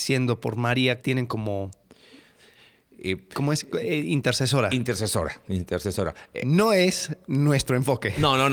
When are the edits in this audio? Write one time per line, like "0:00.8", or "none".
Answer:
0:01.0